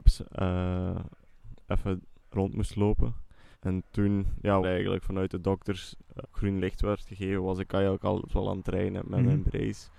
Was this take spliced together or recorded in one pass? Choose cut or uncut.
cut